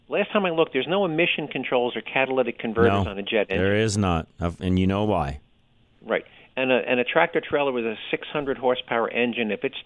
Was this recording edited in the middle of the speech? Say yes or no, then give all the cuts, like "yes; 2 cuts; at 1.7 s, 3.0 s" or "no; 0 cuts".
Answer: no; 0 cuts